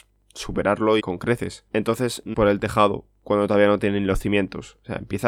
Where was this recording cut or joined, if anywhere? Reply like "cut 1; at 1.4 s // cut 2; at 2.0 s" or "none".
cut 1; at 1.0 s // cut 2; at 1.7 s // cut 3; at 2.3 s